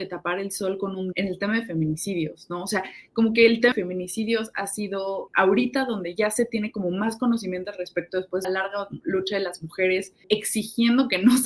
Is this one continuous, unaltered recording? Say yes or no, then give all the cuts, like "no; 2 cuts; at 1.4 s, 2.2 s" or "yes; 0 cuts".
no; 5 cuts; at 1.1 s, 3.7 s, 5.3 s, 8.4 s, 10.2 s